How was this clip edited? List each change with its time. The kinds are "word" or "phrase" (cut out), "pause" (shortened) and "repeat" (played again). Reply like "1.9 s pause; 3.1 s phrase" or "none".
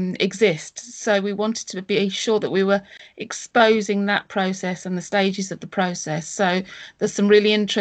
none